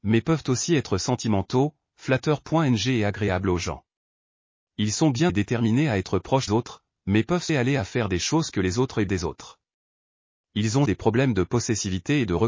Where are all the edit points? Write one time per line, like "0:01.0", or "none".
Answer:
0:05.3
0:06.5
0:07.5
0:08.5
0:09.1
0:10.9